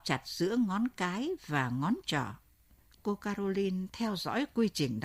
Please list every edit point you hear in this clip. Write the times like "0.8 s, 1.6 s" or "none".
2.8 s